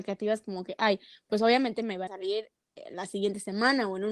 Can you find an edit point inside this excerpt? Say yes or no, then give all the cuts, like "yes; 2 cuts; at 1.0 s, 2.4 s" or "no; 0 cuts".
yes; 1 cut; at 2.1 s